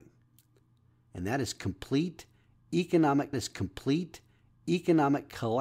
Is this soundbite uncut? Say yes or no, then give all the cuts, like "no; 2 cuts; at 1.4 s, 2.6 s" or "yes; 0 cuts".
no; 1 cut; at 3.3 s